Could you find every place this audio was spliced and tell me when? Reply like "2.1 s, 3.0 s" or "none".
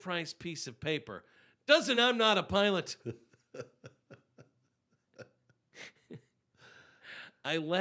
2.0 s

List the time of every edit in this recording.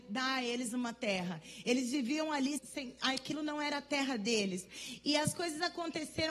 2.6 s

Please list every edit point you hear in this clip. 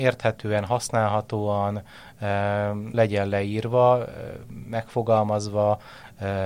2.9 s

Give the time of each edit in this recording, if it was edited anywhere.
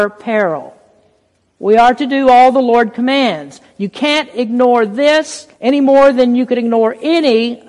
5.5 s

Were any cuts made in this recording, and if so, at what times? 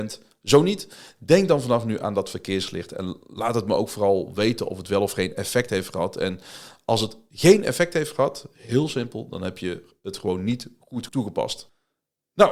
11.1 s

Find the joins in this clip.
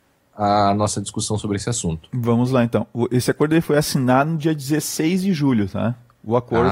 none

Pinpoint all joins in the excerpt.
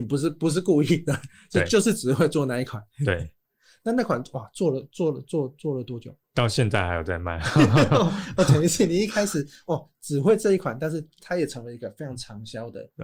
6.2 s

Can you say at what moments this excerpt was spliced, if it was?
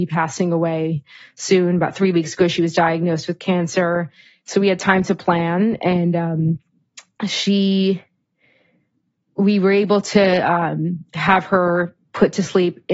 none

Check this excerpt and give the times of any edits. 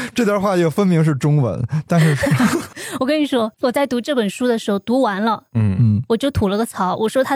3.5 s

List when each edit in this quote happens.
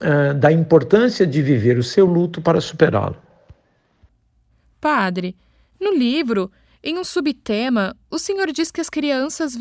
none

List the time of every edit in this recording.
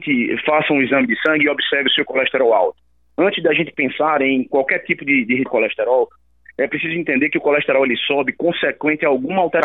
5.5 s

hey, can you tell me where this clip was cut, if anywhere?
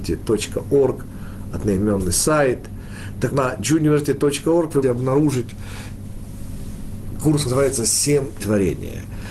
3.3 s, 4.8 s, 7.4 s, 8.4 s

